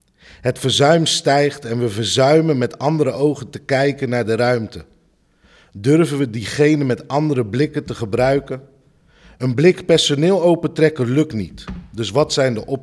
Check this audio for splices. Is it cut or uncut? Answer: uncut